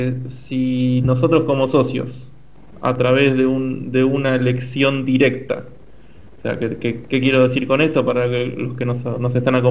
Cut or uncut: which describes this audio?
uncut